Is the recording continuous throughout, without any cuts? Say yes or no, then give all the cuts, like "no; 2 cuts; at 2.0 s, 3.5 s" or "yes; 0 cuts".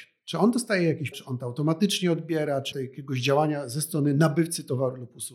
no; 2 cuts; at 1.1 s, 2.7 s